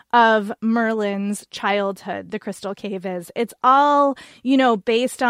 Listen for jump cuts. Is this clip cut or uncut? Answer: uncut